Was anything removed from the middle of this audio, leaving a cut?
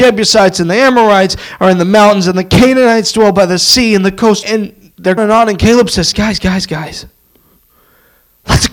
yes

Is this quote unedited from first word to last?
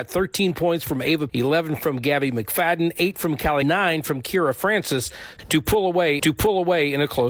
no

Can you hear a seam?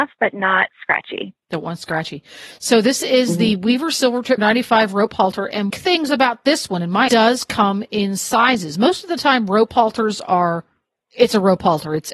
yes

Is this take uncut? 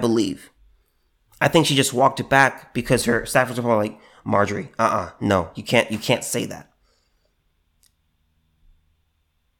yes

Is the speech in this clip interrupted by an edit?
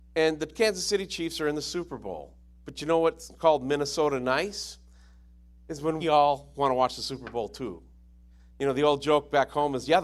yes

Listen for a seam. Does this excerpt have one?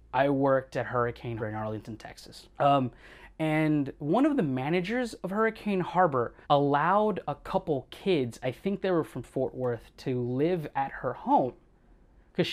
yes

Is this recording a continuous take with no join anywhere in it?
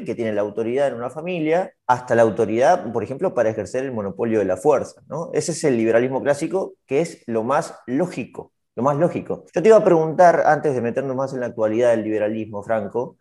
no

